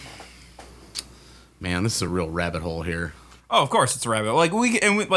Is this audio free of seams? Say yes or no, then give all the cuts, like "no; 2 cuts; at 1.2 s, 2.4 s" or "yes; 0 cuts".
yes; 0 cuts